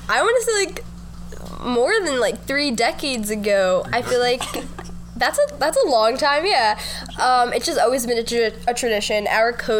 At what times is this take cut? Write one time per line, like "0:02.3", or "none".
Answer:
none

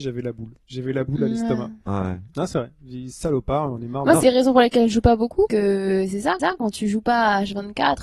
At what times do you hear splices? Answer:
0:04.2
0:05.5
0:06.4

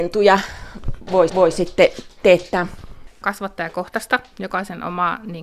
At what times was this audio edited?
0:01.3
0:03.2

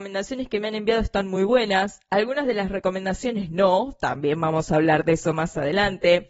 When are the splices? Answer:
none

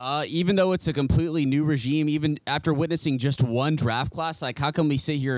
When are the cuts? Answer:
none

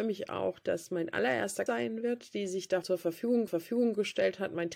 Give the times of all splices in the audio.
0:01.7
0:02.8
0:03.5

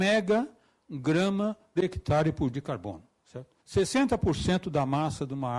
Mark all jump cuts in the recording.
0:01.8
0:02.5
0:03.6

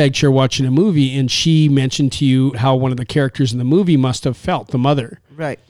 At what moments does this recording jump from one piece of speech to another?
0:02.5

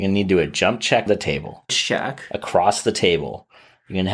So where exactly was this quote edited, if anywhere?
0:01.1
0:01.7

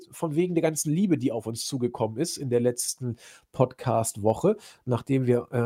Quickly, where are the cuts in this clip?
none

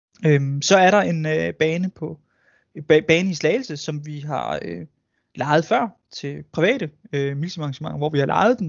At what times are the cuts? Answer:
none

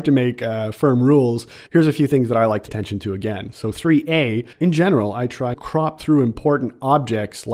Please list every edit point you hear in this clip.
0:01.7
0:02.7
0:04.5
0:05.5

